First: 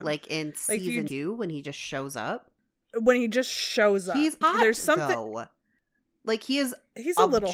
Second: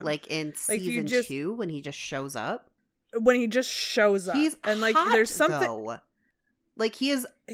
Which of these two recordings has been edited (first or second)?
first